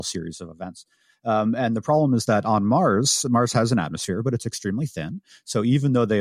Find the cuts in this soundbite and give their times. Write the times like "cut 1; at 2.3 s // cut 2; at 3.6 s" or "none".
none